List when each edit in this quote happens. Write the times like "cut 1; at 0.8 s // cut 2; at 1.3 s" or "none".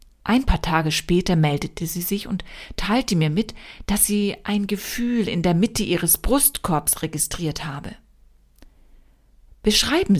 none